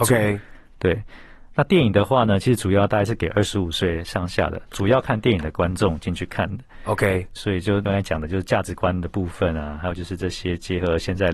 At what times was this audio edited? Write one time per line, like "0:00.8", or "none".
0:07.4